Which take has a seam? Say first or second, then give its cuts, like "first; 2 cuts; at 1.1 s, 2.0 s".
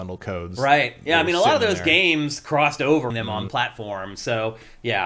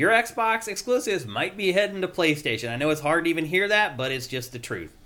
first; 2 cuts; at 3.1 s, 3.5 s